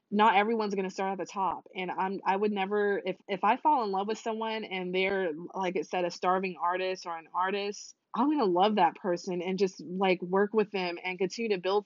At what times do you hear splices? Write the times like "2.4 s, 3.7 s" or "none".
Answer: 3.2 s, 8.0 s